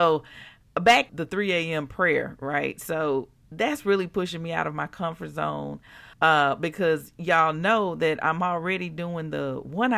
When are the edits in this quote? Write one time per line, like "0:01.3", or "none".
0:01.1
0:06.1